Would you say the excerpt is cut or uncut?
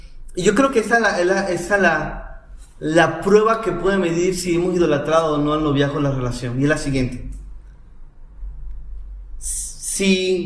cut